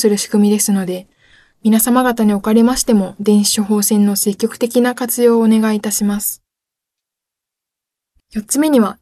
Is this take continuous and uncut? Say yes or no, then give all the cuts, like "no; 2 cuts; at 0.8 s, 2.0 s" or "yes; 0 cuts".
yes; 0 cuts